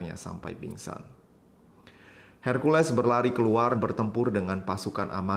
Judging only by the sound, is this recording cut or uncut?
cut